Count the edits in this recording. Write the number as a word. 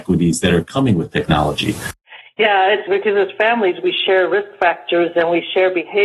one